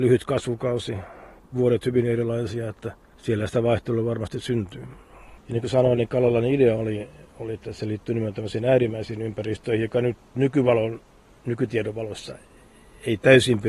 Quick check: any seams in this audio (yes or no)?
no